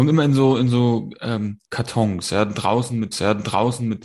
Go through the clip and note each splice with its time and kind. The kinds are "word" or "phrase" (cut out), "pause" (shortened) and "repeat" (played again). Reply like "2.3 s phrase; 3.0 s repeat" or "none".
1.6 s pause; 3.1 s repeat